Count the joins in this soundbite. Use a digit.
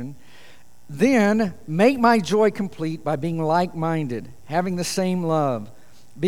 0